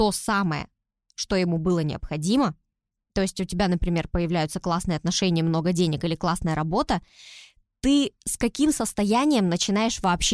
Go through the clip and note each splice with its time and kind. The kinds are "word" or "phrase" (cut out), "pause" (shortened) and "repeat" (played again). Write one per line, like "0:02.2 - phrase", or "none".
none